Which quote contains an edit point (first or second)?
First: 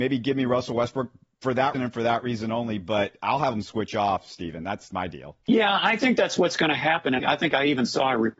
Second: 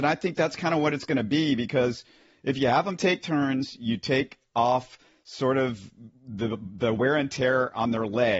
first